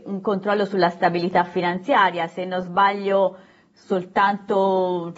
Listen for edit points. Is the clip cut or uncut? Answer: uncut